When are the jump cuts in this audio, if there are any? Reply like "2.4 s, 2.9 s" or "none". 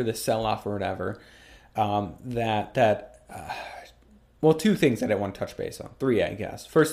none